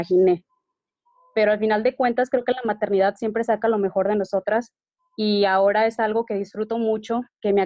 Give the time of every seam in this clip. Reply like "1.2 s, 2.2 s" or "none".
none